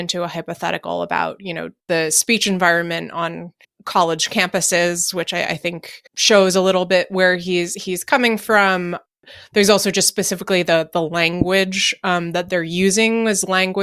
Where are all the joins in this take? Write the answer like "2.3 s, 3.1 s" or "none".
1.8 s, 3.6 s, 6.1 s